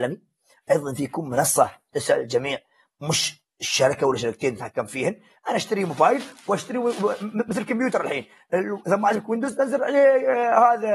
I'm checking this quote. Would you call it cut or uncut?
uncut